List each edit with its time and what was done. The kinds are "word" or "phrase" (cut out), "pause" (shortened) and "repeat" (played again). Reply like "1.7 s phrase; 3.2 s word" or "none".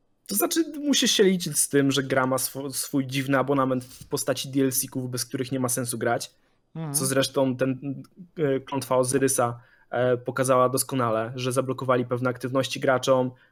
none